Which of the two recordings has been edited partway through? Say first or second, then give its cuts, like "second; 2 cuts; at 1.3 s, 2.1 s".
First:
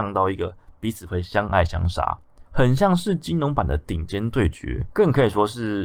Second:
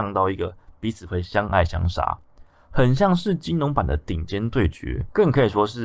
first; 1 cut; at 2.5 s